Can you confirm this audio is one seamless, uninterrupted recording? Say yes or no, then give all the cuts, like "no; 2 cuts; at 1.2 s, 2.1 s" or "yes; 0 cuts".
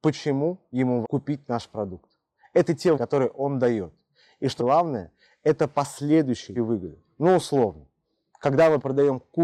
no; 4 cuts; at 1.0 s, 2.9 s, 4.6 s, 6.6 s